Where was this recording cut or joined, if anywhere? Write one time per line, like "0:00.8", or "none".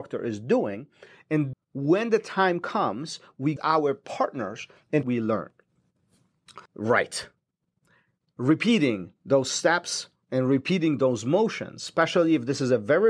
0:01.5
0:03.6
0:05.0
0:06.7